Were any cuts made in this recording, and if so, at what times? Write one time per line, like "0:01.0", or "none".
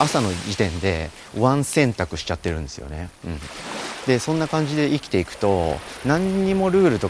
0:03.2